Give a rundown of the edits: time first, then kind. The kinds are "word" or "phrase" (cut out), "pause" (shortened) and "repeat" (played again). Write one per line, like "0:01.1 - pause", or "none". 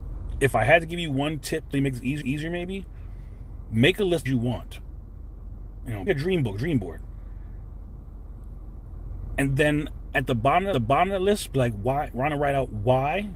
0:01.7 - word
0:02.2 - repeat
0:04.3 - phrase
0:06.1 - phrase
0:10.7 - repeat